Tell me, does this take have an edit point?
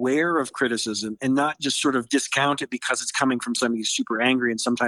no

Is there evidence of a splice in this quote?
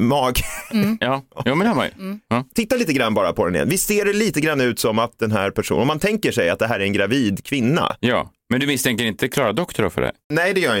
yes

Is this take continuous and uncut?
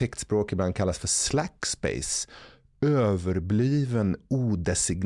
yes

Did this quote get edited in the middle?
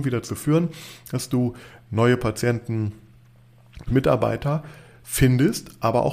yes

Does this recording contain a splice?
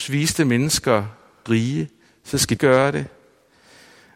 yes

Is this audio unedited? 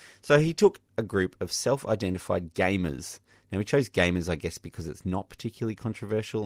yes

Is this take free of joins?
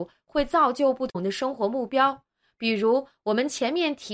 yes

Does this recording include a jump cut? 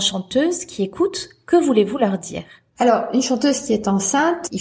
no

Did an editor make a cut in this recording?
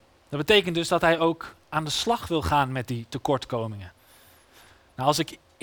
no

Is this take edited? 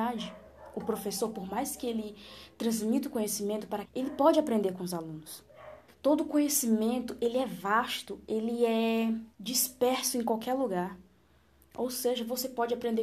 yes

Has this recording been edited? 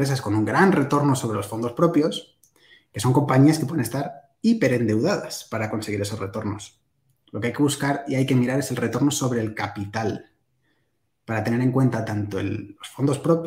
no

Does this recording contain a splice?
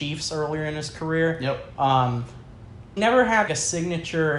yes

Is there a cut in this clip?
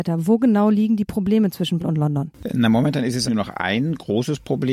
yes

